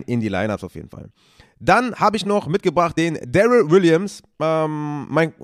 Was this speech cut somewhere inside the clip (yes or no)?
no